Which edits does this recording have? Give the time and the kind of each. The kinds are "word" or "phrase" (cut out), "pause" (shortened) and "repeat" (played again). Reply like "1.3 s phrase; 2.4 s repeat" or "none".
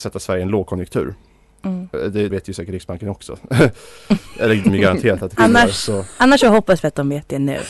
2.3 s word; 4.6 s word

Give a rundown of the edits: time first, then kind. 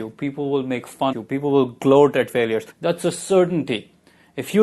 1.1 s word; 2.3 s word; 2.7 s pause

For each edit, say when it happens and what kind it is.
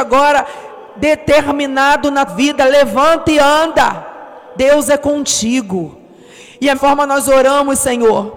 2.3 s word; 6.7 s word

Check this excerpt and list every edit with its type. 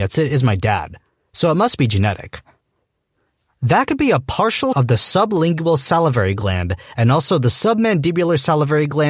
4.7 s word

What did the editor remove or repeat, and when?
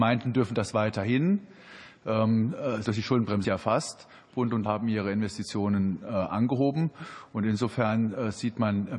2.9 s word; 3.4 s word; 4.7 s word

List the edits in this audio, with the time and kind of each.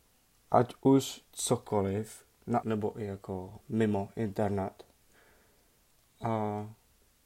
1.2 s word; 2.6 s word; 3.6 s pause

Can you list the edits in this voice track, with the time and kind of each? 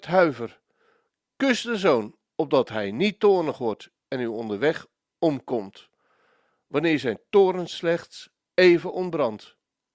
none

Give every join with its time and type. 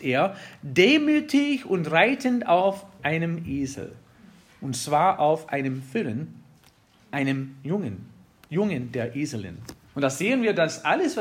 9.8 s pause

